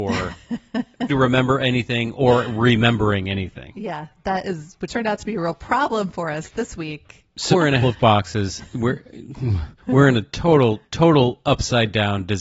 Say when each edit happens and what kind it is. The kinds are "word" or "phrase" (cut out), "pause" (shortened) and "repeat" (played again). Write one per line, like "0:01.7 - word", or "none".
0:01.1 - phrase
0:04.9 - word
0:07.5 - word
0:07.8 - phrase
0:09.8 - pause
0:10.8 - pause